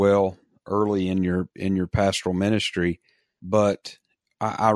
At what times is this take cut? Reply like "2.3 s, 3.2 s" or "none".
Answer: none